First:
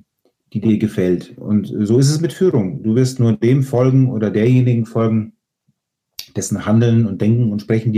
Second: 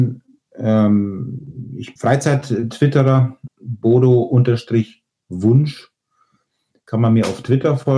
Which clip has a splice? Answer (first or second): second